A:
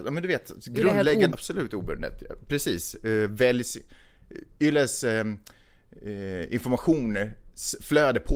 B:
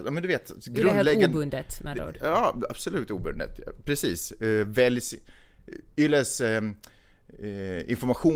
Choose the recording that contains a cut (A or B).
A